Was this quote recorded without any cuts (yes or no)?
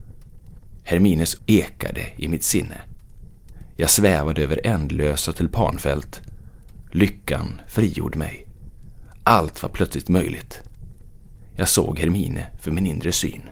no